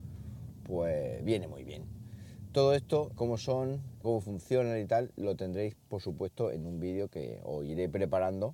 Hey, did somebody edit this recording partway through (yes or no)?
yes